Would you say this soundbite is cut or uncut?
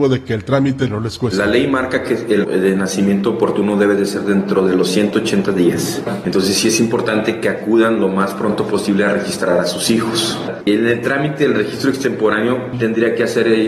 cut